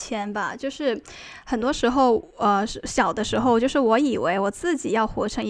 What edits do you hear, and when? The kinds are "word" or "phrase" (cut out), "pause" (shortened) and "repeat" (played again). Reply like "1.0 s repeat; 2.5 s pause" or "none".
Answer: none